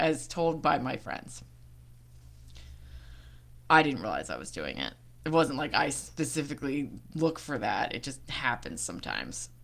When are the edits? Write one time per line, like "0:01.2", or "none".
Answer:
none